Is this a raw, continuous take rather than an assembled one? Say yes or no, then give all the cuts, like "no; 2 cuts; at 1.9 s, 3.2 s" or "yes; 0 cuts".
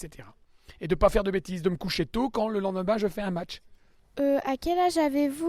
yes; 0 cuts